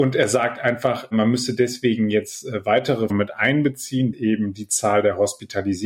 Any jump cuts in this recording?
yes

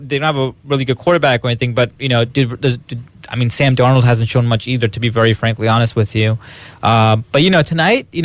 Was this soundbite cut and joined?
no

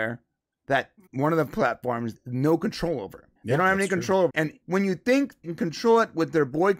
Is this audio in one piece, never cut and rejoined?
no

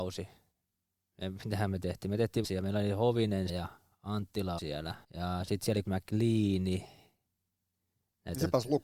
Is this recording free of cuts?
no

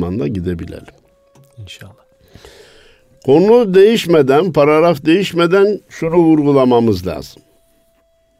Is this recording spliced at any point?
no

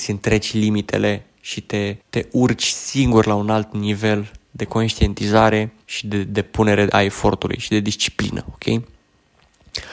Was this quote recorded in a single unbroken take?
no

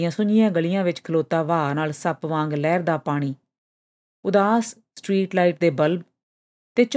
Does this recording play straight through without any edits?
yes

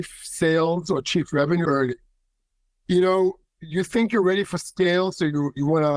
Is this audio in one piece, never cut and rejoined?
no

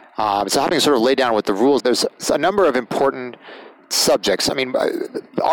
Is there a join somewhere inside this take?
yes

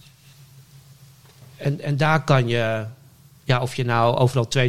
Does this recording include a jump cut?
no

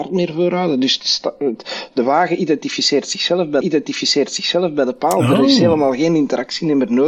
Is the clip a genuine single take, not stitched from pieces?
no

